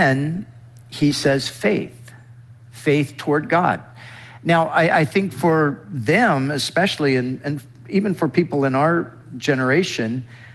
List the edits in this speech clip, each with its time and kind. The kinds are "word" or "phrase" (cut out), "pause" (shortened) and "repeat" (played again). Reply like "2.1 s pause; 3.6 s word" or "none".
none